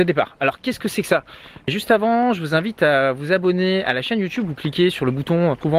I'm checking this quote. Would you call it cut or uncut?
uncut